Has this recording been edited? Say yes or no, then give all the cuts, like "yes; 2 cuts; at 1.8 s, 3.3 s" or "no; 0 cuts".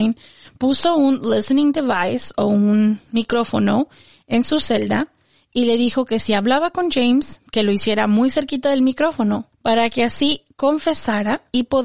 no; 0 cuts